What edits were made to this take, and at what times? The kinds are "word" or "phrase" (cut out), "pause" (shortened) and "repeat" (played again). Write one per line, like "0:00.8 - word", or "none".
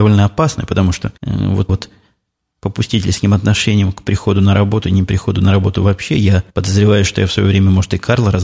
0:01.2 - pause
0:01.7 - word
0:06.5 - pause

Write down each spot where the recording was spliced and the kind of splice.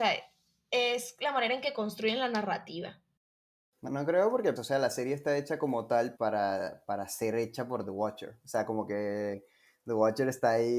0:03.9 - word
0:04.6 - word
0:06.2 - word

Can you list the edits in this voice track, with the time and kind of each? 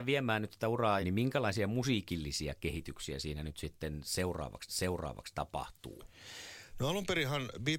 0:01.0 - phrase
0:04.7 - repeat

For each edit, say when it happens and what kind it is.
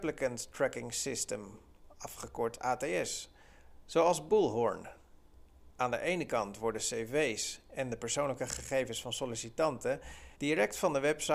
0:10.3 - pause

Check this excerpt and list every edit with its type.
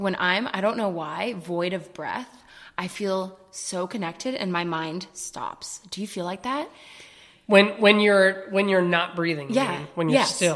none

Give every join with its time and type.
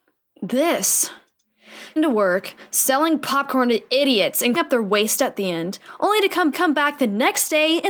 0:02.0 - word
0:04.5 - word
0:06.5 - repeat

